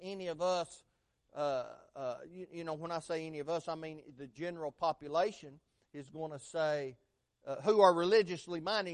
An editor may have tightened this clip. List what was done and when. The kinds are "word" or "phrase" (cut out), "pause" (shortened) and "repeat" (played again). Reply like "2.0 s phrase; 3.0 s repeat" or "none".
none